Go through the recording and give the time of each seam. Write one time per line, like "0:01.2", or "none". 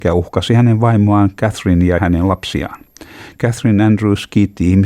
0:02.0